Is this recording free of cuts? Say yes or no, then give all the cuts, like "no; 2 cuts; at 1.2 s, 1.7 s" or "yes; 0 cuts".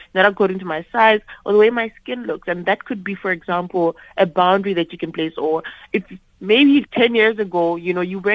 yes; 0 cuts